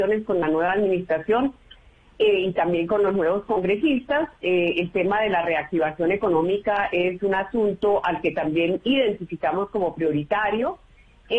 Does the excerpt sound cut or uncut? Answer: uncut